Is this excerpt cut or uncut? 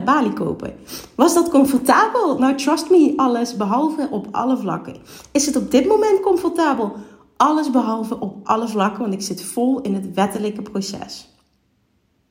uncut